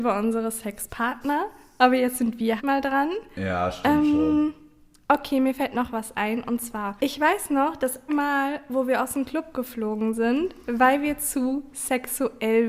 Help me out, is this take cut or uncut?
cut